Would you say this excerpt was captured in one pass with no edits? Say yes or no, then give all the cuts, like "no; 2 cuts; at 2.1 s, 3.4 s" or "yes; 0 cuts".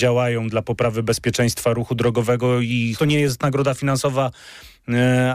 no; 1 cut; at 3.0 s